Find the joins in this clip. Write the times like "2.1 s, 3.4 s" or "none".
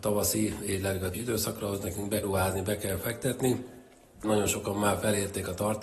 1.1 s, 2.2 s, 4.2 s